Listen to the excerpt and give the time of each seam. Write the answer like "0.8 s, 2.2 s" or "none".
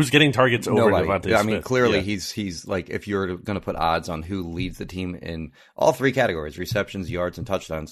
none